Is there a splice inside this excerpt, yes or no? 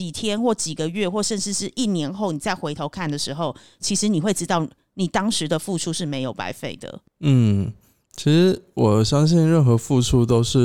yes